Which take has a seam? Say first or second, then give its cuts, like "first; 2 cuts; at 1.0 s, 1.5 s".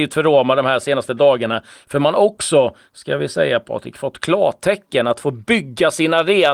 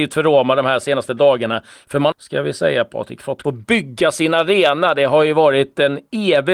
second; 2 cuts; at 2.1 s, 3.4 s